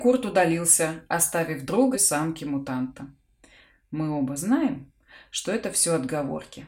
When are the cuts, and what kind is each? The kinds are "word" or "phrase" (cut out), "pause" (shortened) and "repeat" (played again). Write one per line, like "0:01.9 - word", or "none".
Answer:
0:01.9 - phrase